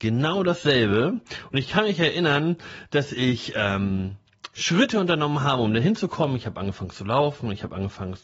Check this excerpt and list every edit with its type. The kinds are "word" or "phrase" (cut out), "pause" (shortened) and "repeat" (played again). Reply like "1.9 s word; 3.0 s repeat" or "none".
none